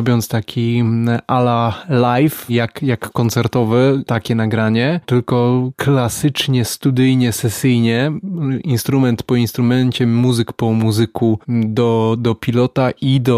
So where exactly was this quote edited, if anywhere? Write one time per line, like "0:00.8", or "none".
none